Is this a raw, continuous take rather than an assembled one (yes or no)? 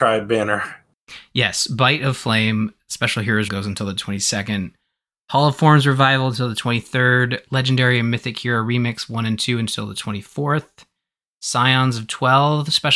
no